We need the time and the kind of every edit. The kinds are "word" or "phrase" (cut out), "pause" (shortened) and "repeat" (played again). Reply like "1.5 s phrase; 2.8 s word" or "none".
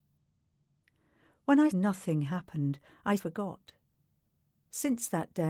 1.7 s word; 3.2 s word